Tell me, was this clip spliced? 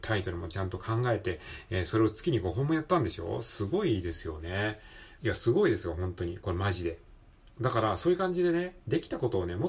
yes; 1 cut; at 5.1 s

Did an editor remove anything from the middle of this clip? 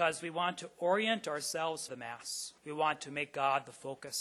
yes; 2 cuts; at 1.9 s, 2.6 s

